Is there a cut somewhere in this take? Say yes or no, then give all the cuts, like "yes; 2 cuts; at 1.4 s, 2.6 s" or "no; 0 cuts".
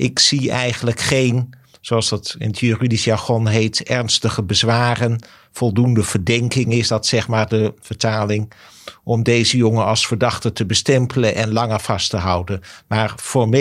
no; 0 cuts